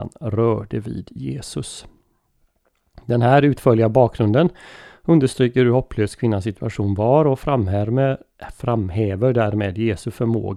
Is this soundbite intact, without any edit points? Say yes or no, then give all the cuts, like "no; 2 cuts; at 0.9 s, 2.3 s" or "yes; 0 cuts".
yes; 0 cuts